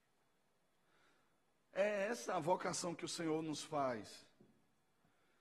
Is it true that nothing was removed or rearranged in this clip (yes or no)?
yes